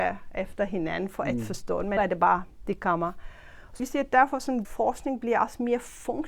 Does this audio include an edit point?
yes; 3 cuts; at 2.0 s, 3.8 s, 4.6 s

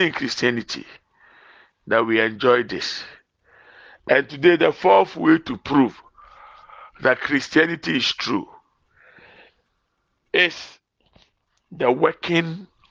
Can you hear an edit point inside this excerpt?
no; 0 cuts

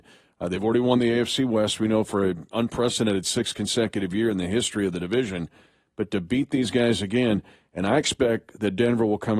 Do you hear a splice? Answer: no; 0 cuts

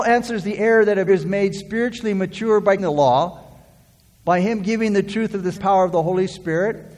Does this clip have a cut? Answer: yes; 3 cuts; at 1.1 s, 2.8 s, 5.5 s

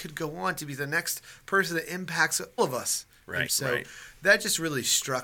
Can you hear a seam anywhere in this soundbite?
yes; 2 cuts; at 2.6 s, 3.5 s

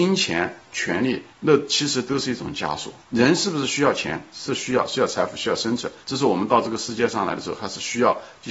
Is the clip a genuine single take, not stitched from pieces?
no; 3 cuts; at 1.3 s, 3.0 s, 6.0 s

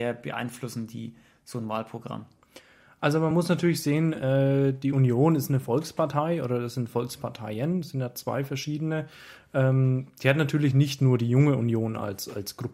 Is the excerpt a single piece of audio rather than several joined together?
yes; 0 cuts

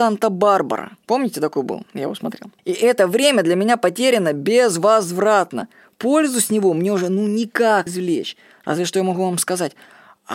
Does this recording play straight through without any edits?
no; 3 cuts; at 1.0 s, 2.6 s, 7.9 s

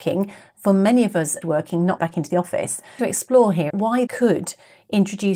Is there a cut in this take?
yes; 5 cuts; at 1.4 s, 2.0 s, 3.0 s, 3.7 s, 4.1 s

